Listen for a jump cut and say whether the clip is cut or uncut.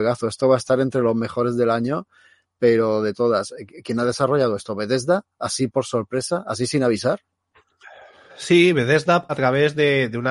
cut